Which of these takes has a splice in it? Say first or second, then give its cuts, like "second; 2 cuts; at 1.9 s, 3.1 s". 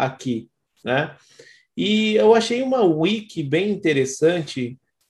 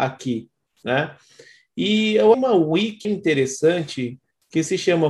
second; 2 cuts; at 2.3 s, 3.0 s